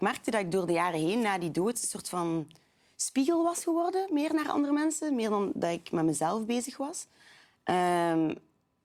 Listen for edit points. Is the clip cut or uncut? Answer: uncut